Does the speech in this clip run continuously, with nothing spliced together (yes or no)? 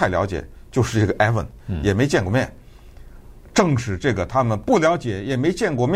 yes